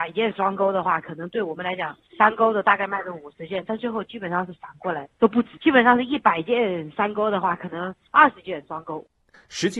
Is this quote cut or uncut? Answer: cut